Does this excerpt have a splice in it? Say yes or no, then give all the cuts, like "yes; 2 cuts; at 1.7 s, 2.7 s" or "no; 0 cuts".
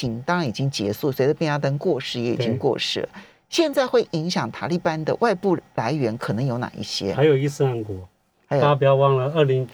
no; 0 cuts